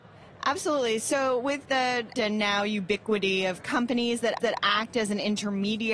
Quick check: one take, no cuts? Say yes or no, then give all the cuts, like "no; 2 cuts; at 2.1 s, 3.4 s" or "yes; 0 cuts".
no; 2 cuts; at 2.1 s, 4.4 s